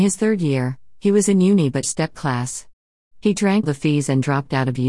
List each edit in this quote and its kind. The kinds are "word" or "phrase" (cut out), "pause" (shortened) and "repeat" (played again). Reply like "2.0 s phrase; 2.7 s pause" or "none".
1.8 s word; 2.1 s word; 3.6 s word